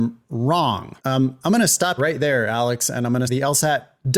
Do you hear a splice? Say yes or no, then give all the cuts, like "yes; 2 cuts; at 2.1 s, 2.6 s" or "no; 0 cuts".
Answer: yes; 3 cuts; at 1.0 s, 2.0 s, 3.3 s